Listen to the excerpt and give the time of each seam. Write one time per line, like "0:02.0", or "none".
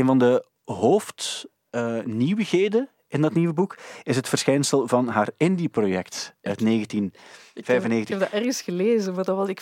none

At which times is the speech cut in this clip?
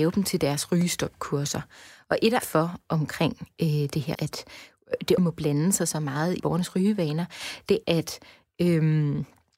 0:02.4
0:04.1
0:05.2
0:06.4
0:07.8

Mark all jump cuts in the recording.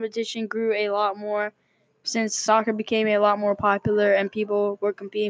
none

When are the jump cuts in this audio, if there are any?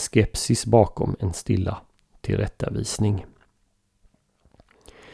none

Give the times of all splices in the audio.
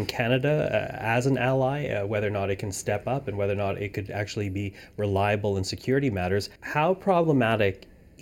0:06.6

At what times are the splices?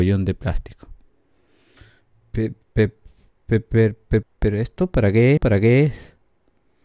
0:02.6
0:04.2
0:05.4

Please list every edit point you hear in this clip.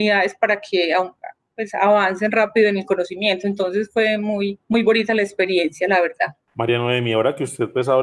0:04.6

